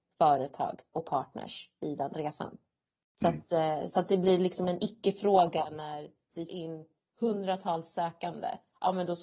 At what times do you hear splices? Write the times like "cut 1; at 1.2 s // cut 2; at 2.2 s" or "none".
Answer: cut 1; at 6.5 s